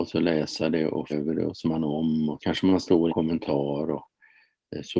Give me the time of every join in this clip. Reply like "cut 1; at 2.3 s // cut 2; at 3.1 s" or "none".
cut 1; at 1.1 s // cut 2; at 1.6 s // cut 3; at 2.4 s // cut 4; at 3.1 s